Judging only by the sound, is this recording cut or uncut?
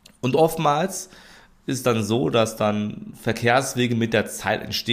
uncut